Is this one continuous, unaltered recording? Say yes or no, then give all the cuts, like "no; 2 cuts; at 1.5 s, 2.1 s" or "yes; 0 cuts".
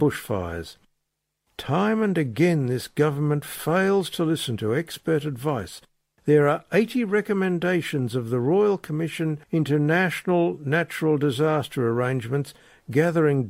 no; 1 cut; at 9.4 s